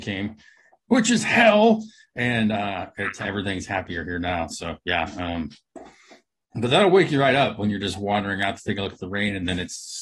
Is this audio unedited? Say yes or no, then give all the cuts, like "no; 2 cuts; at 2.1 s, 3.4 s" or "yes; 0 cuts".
yes; 0 cuts